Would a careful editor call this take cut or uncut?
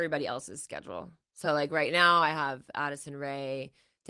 uncut